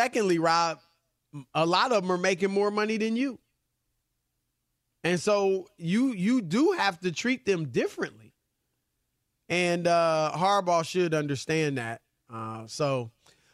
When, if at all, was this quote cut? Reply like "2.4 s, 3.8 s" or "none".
none